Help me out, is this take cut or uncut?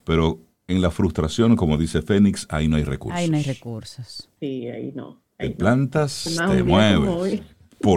cut